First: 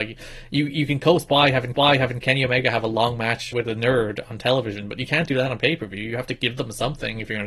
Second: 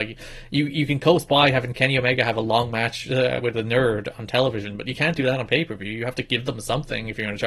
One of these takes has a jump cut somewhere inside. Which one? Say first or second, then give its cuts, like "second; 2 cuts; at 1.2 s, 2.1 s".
first; 2 cuts; at 1.7 s, 3.5 s